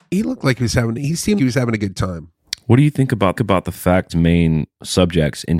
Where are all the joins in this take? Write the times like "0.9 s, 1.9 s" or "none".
1.4 s, 3.4 s, 4.1 s